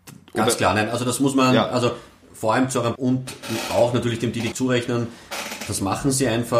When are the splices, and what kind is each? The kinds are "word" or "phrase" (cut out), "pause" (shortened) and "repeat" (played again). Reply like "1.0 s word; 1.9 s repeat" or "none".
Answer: 3.0 s word; 4.5 s word